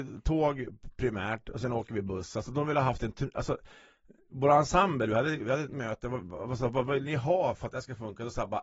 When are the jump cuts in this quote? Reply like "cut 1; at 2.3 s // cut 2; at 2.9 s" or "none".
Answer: none

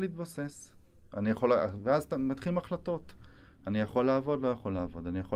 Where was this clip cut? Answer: none

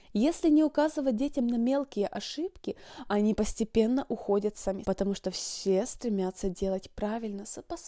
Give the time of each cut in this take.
cut 1; at 4.8 s

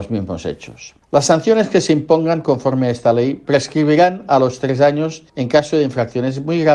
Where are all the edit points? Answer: cut 1; at 1.0 s // cut 2; at 5.3 s

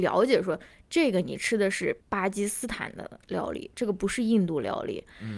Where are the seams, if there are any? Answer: cut 1; at 2.0 s

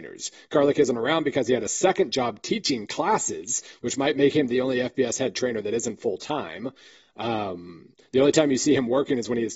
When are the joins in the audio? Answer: none

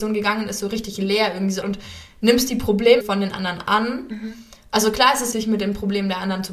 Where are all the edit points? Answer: cut 1; at 1.6 s // cut 2; at 3.0 s // cut 3; at 5.3 s

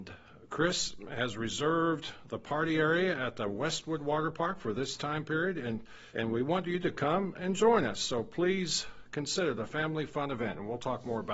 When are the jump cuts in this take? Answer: cut 1; at 6.1 s

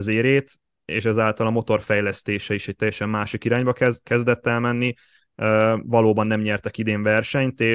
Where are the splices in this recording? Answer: none

